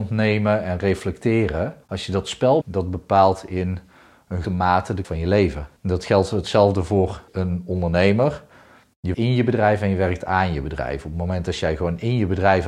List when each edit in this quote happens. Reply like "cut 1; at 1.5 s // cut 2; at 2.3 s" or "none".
cut 1; at 1.8 s // cut 2; at 2.6 s // cut 3; at 4.4 s // cut 4; at 5.0 s // cut 5; at 5.8 s // cut 6; at 7.3 s // cut 7; at 9.1 s